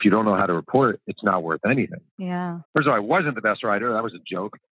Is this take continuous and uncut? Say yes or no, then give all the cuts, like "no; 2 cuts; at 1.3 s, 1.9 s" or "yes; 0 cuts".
no; 1 cut; at 2.6 s